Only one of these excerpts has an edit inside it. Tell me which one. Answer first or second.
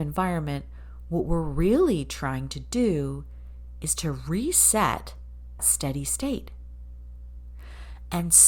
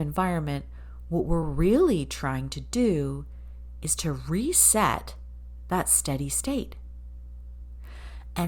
first